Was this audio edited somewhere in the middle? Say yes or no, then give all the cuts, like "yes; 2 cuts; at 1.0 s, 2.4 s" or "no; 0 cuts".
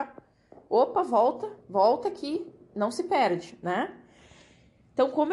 no; 0 cuts